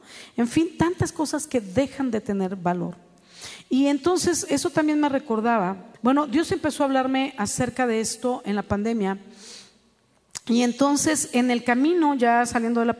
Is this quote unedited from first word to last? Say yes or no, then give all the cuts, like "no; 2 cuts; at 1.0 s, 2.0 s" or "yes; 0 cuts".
no; 1 cut; at 5.9 s